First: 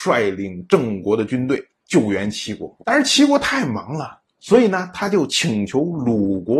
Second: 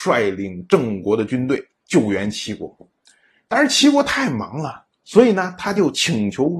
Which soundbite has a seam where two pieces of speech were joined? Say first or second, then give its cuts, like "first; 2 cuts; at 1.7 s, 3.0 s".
first; 1 cut; at 2.8 s